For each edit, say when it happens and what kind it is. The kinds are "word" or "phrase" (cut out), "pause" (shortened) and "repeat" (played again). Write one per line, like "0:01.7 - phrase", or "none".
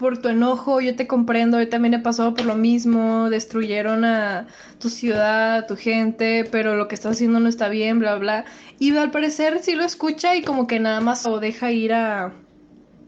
0:11.2 - word